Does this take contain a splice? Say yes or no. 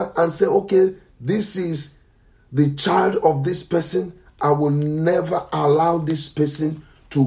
no